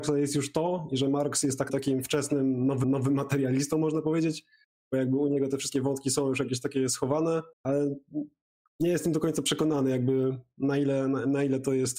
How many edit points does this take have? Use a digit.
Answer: 3